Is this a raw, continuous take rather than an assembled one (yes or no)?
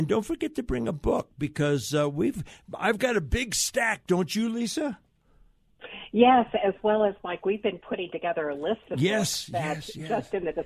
yes